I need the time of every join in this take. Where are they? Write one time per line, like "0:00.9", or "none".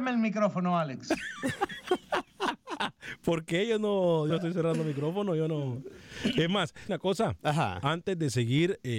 0:04.3
0:06.9